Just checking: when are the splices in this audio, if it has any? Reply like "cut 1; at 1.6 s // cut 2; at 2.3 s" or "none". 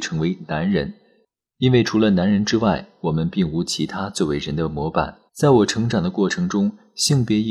cut 1; at 5.3 s